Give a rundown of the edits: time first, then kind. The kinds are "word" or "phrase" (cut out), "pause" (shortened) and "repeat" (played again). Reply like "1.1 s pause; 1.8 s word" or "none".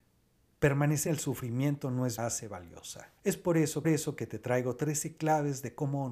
1.1 s word; 2.2 s phrase; 3.2 s pause; 3.8 s repeat